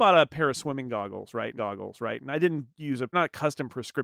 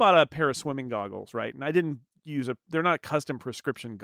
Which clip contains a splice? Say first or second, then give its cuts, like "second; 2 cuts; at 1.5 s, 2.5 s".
first; 3 cuts; at 1.6 s, 2.7 s, 3.1 s